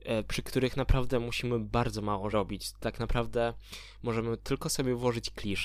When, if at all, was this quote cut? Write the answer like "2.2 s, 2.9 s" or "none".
2.3 s